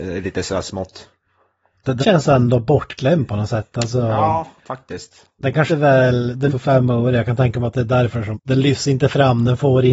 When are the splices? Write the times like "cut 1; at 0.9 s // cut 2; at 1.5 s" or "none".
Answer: cut 1; at 2.0 s // cut 2; at 4.6 s // cut 3; at 5.7 s // cut 4; at 6.5 s // cut 5; at 8.3 s